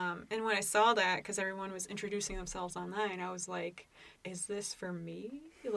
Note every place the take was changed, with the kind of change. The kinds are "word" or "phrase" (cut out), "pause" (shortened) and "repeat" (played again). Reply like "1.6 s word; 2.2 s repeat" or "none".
4.2 s pause